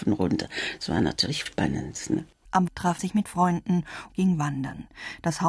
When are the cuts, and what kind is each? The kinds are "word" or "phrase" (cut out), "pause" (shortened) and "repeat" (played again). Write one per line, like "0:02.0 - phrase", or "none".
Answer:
0:01.5 - word
0:02.7 - word
0:03.0 - word
0:04.1 - word